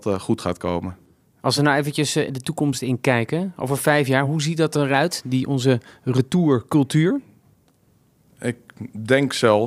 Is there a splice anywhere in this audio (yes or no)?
no